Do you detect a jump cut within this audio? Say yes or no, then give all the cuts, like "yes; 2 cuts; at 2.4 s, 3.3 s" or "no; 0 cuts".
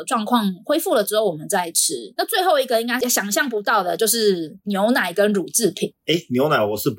no; 0 cuts